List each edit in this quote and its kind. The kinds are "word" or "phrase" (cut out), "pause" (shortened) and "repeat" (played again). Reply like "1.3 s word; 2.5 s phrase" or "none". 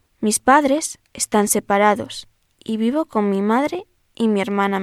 none